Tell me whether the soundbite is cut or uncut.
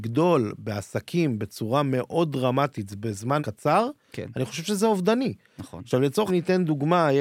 cut